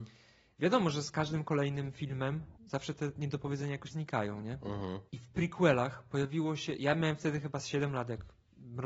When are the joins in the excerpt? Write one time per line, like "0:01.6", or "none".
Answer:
0:02.6
0:03.9
0:05.1